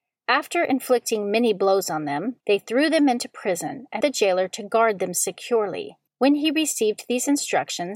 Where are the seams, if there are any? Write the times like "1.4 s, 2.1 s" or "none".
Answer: 2.4 s, 4.0 s, 6.1 s